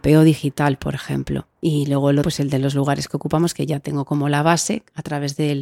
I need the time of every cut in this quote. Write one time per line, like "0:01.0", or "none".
0:01.6
0:02.2